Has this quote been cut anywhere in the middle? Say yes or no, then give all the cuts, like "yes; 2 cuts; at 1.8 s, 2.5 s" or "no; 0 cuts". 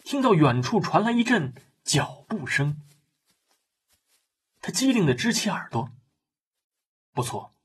no; 0 cuts